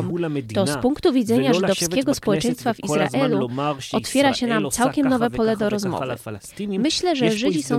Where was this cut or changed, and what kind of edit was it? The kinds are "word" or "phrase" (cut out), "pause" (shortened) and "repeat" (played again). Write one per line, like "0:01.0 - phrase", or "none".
none